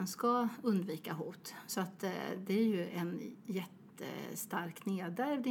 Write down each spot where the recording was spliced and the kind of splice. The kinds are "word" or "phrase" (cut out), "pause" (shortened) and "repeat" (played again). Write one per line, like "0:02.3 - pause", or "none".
none